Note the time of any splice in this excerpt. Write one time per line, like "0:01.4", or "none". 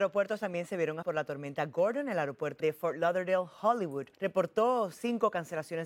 0:01.0
0:02.6
0:04.1